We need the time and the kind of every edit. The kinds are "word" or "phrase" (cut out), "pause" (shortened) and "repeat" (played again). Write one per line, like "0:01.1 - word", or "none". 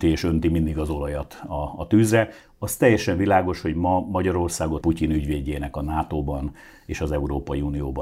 0:04.8 - word